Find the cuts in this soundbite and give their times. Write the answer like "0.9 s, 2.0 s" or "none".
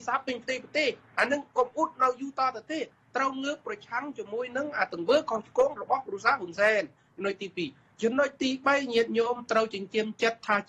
none